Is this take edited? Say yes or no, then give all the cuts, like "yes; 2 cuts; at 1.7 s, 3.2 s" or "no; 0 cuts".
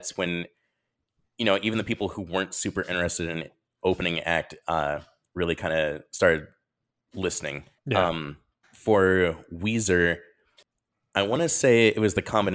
yes; 2 cuts; at 7.8 s, 8.6 s